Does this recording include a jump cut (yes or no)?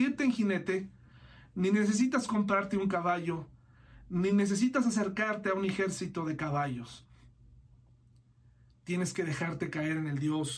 no